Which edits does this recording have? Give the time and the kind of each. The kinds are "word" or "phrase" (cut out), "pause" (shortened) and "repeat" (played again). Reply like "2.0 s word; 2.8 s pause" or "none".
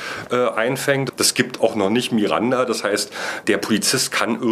3.4 s word